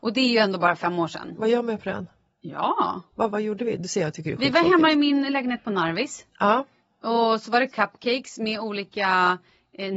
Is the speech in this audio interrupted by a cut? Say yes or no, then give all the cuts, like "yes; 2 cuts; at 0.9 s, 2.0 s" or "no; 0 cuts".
yes; 1 cut; at 3.3 s